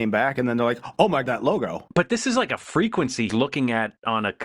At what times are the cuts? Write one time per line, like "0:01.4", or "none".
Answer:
0:01.2
0:03.3